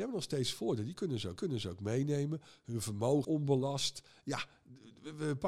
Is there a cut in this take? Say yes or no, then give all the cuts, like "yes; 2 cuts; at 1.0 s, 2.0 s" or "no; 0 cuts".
yes; 2 cuts; at 1.4 s, 3.2 s